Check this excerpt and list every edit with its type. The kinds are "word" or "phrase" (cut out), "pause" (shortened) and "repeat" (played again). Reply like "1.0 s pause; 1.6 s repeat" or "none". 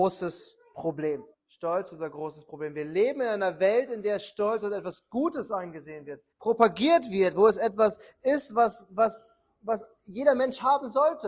1.3 s pause; 6.3 s pause